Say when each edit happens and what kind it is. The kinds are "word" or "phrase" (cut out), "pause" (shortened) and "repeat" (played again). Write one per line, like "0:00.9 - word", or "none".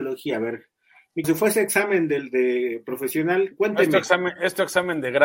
0:01.2 - phrase